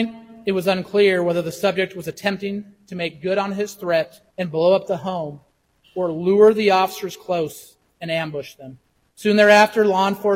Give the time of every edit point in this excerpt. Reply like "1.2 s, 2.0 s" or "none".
none